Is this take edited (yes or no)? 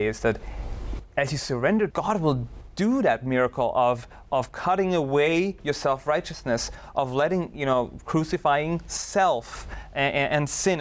yes